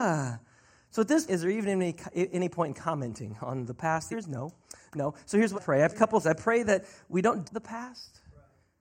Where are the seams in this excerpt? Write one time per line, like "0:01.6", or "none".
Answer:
0:01.3
0:04.1
0:05.5
0:05.9
0:06.2
0:07.4